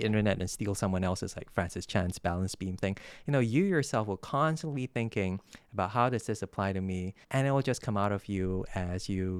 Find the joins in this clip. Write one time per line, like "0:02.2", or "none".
0:07.2

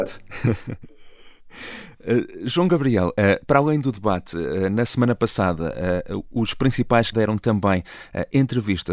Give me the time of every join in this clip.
0:07.1

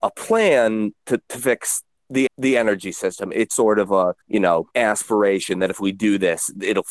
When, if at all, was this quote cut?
0:02.3
0:03.5
0:04.2
0:04.7

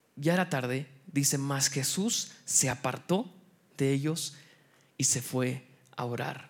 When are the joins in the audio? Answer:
none

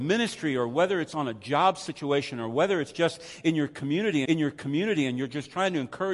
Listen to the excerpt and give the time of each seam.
0:04.2

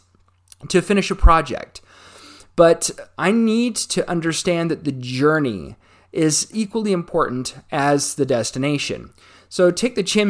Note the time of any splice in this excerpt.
0:06.5

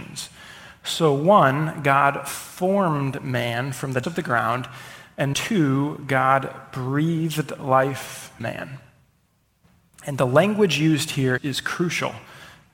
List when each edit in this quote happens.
0:04.0
0:05.3
0:08.4
0:11.4

